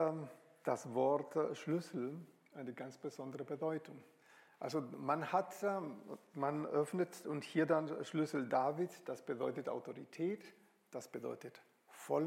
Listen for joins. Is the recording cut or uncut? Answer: uncut